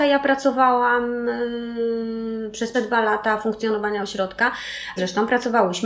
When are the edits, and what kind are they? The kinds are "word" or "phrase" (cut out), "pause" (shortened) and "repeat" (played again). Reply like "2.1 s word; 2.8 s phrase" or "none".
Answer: 2.7 s word; 5.0 s word